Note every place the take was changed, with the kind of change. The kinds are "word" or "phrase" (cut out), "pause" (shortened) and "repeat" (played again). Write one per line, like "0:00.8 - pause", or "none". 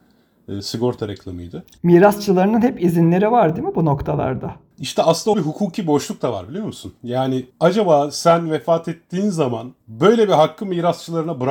0:05.3 - word
0:07.5 - pause
0:09.8 - pause